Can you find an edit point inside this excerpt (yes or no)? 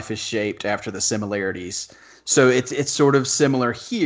no